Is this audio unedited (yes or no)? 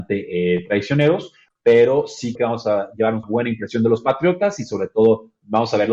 no